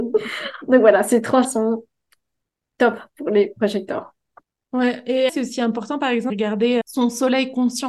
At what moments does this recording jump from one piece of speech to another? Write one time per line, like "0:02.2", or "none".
0:01.4
0:04.4
0:05.3
0:06.3
0:06.8